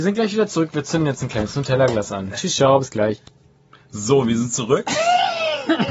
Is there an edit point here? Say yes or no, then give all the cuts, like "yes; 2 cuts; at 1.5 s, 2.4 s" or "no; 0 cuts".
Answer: no; 0 cuts